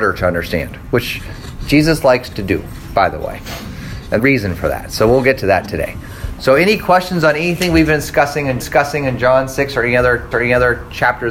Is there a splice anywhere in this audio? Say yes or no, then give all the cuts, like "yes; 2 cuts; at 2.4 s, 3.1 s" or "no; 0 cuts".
yes; 3 cuts; at 4.2 s, 8.6 s, 10.3 s